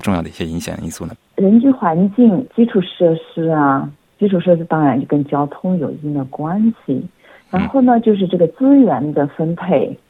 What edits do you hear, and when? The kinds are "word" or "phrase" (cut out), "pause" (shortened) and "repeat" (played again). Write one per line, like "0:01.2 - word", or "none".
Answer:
0:01.2 - pause